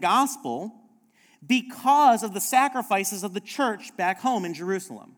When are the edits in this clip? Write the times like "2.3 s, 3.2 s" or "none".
none